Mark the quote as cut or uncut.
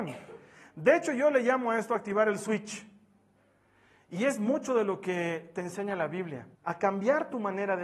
cut